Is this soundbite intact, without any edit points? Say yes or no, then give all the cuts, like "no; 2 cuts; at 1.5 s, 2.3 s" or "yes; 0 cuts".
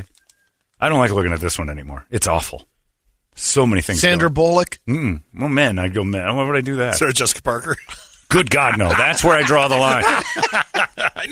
yes; 0 cuts